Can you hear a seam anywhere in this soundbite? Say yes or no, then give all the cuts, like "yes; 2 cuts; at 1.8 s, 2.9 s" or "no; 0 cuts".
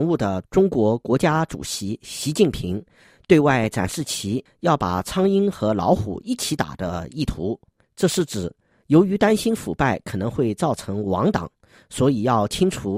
no; 0 cuts